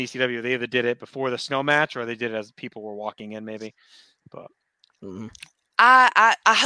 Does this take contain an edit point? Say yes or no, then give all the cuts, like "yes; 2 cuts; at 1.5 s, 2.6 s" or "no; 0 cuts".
no; 0 cuts